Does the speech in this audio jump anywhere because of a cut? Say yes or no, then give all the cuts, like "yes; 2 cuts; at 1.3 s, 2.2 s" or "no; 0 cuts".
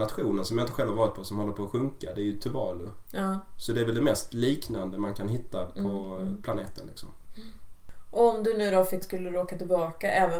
yes; 1 cut; at 9.0 s